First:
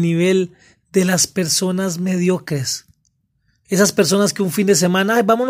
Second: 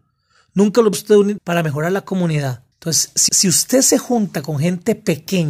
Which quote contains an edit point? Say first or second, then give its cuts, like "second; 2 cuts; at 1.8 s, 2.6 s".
second; 4 cuts; at 0.9 s, 1.4 s, 2.7 s, 3.3 s